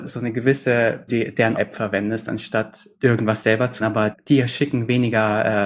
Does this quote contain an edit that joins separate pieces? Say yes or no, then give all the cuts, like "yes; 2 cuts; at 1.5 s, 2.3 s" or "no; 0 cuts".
yes; 5 cuts; at 1.1 s, 1.6 s, 2.9 s, 3.8 s, 4.1 s